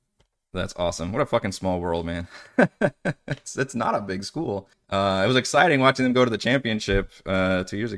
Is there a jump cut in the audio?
yes; 1 cut; at 4.7 s

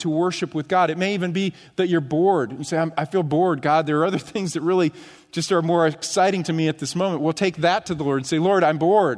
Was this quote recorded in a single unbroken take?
yes; 0 cuts

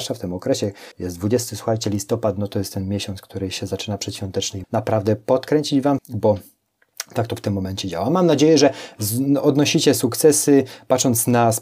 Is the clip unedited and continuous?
no; 3 cuts; at 0.9 s, 4.6 s, 6.0 s

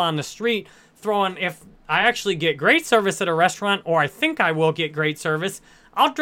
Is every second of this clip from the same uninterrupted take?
yes; 0 cuts

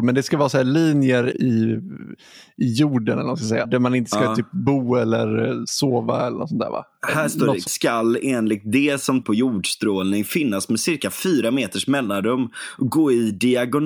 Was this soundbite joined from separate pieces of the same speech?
yes; 4 cuts; at 1.3 s, 3.6 s, 7.7 s, 9.2 s

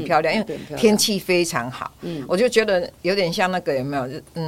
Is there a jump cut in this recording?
no; 0 cuts

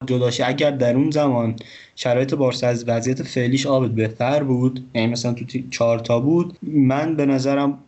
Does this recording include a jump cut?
no; 0 cuts

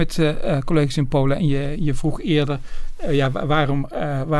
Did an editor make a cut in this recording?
no; 0 cuts

